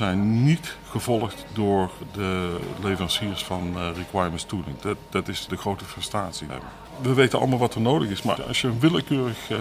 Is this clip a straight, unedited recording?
no; 3 cuts; at 5.5 s, 6.5 s, 8.4 s

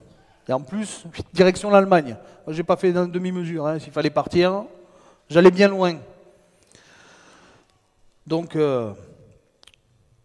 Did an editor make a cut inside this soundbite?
no; 0 cuts

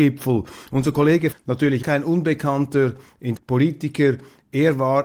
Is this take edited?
yes; 3 cuts; at 1.3 s, 1.8 s, 3.4 s

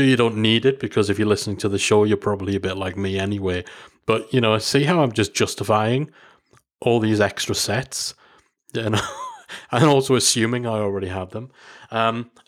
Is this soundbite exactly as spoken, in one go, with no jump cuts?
yes; 0 cuts

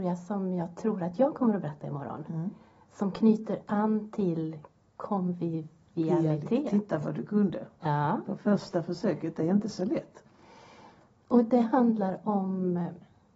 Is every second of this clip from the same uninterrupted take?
yes; 0 cuts

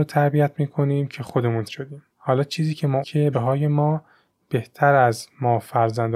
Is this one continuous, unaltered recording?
no; 4 cuts; at 1.7 s, 2.1 s, 3.0 s, 3.3 s

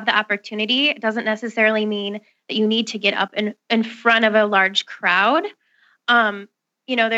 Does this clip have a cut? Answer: no; 0 cuts

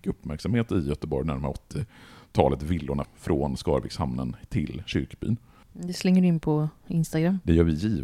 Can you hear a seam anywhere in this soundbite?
yes; 1 cut; at 3.0 s

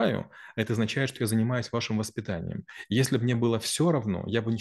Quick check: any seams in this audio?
no; 0 cuts

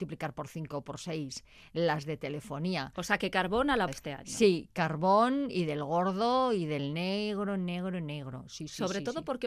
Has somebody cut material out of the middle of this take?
yes; 1 cut; at 3.9 s

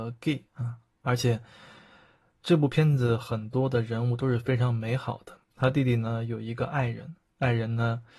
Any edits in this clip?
yes; 1 cut; at 5.4 s

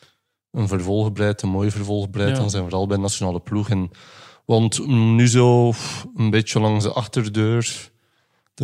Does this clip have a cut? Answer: no; 0 cuts

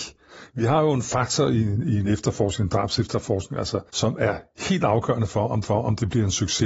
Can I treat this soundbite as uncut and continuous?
no; 2 cuts; at 3.9 s, 5.6 s

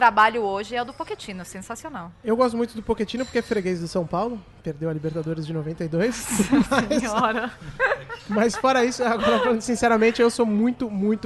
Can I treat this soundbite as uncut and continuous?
yes; 0 cuts

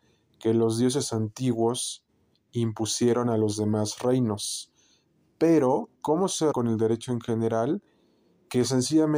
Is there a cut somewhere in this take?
yes; 2 cuts; at 5.9 s, 6.5 s

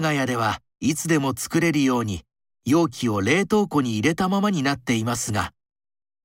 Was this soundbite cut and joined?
no; 0 cuts

